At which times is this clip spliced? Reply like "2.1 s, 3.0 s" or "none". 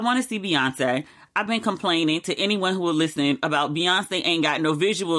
none